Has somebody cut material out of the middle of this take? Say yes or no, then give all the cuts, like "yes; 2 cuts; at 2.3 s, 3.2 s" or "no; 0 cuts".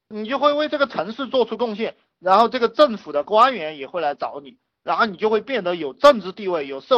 no; 0 cuts